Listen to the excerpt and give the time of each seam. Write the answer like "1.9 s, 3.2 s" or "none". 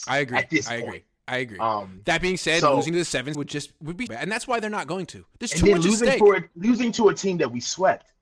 3.3 s, 4.1 s, 5.3 s